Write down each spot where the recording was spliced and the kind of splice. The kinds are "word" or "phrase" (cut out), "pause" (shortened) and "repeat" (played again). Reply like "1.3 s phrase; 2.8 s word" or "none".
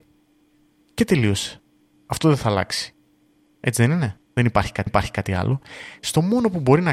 4.2 s pause; 4.9 s repeat